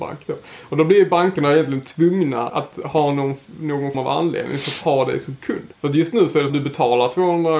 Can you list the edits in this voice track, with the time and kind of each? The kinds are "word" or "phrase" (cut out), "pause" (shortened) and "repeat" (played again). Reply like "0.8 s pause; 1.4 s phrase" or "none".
2.5 s word; 3.9 s word; 5.7 s pause; 6.5 s phrase

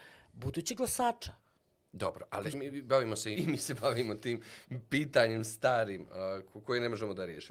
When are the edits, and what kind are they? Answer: 2.5 s phrase; 3.3 s word

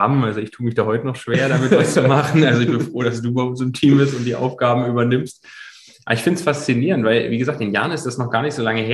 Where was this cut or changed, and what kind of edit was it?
none

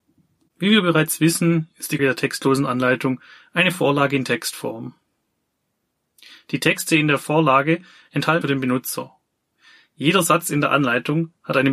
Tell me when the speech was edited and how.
2.0 s word; 8.4 s word

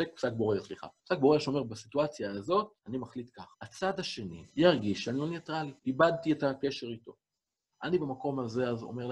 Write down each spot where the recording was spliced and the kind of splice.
1.0 s pause; 2.8 s pause; 3.5 s pause; 4.5 s pause; 5.8 s pause

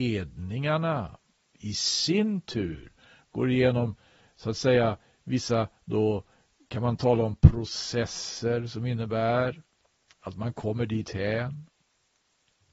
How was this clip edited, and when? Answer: none

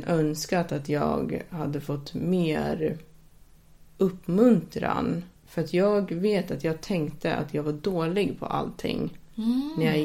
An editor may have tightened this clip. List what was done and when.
5.4 s pause

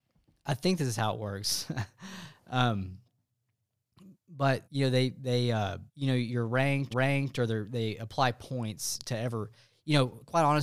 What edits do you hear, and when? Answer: 4.6 s pause; 5.9 s pause; 6.9 s repeat

